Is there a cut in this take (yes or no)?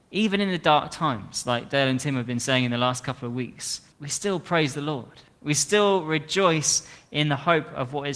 yes